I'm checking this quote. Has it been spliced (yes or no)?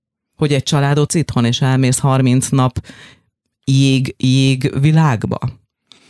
yes